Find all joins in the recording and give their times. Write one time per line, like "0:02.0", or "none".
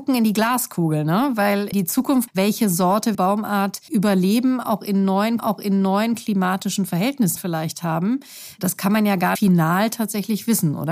0:01.7
0:02.3
0:03.1
0:03.9
0:05.4
0:07.4
0:09.4